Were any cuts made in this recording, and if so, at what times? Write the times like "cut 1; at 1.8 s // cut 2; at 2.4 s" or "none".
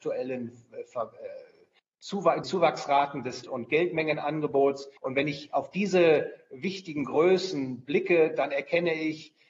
cut 1; at 2.4 s // cut 2; at 3.4 s // cut 3; at 5.0 s